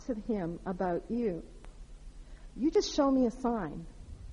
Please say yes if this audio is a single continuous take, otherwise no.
no